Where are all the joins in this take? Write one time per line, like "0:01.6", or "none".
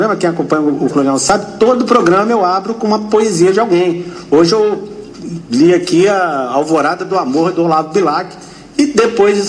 0:00.9